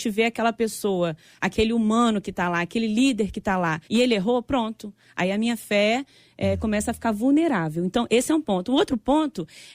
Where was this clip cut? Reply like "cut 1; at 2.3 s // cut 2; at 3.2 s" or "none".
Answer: cut 1; at 3.8 s